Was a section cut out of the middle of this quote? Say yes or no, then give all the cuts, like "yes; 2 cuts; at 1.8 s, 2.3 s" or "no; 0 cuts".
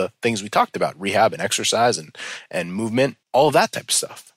yes; 1 cut; at 3.2 s